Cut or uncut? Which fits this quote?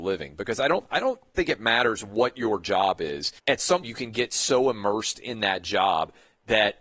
cut